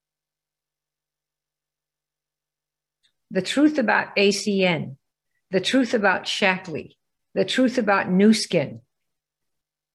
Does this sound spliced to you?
no; 0 cuts

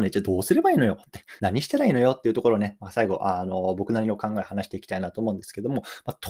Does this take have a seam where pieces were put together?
yes; 1 cut; at 1.4 s

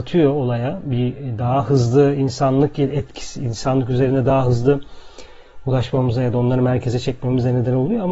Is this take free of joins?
yes; 0 cuts

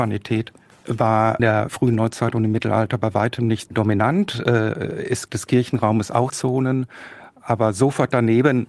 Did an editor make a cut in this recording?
yes; 4 cuts; at 1.4 s, 3.7 s, 5.3 s, 6.3 s

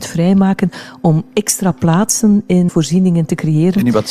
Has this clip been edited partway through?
yes; 1 cut; at 2.7 s

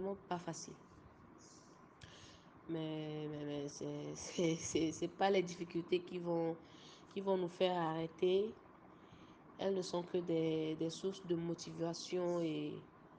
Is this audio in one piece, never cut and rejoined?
yes; 0 cuts

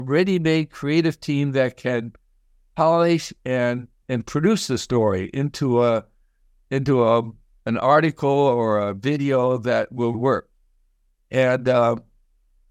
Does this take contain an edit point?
yes; 2 cuts; at 4.0 s, 10.1 s

